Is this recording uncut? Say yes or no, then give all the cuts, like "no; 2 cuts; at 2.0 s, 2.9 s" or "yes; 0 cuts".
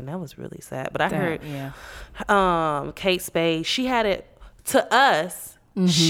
yes; 0 cuts